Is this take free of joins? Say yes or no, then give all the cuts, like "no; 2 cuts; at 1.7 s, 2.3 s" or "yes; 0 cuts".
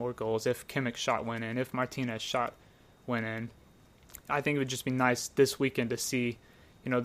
yes; 0 cuts